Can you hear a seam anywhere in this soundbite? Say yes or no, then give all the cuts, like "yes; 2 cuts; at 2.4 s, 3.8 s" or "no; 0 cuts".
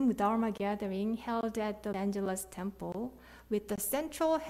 yes; 1 cut; at 1.9 s